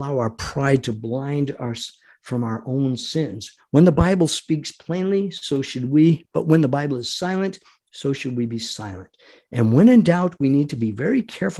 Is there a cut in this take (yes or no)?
no